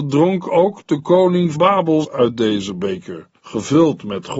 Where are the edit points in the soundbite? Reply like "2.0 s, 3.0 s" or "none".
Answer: 1.5 s, 2.0 s, 3.4 s